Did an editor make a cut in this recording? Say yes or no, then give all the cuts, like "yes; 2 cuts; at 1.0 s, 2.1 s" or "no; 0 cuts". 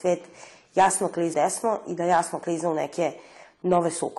yes; 1 cut; at 1.3 s